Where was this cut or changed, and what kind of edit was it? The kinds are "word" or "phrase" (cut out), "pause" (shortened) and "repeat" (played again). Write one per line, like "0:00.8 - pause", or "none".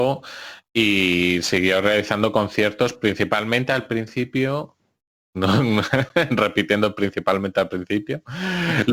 none